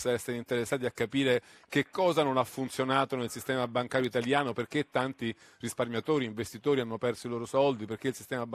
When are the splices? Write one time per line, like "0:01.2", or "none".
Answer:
none